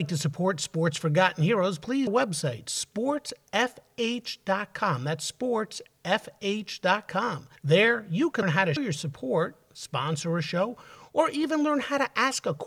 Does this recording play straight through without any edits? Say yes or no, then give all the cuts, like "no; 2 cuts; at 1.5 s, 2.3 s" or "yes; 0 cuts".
no; 4 cuts; at 2.1 s, 7.6 s, 8.4 s, 8.8 s